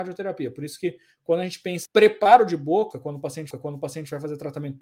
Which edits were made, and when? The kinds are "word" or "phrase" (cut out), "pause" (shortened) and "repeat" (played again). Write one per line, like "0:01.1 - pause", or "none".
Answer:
0:01.9 - word
0:03.5 - repeat